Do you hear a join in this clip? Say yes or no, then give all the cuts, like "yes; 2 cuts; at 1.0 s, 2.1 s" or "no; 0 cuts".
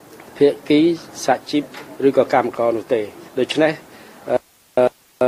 yes; 1 cut; at 3.3 s